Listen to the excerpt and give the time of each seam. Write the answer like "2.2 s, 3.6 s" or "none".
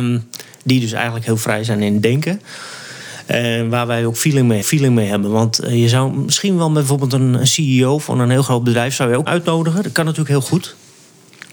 4.6 s, 9.3 s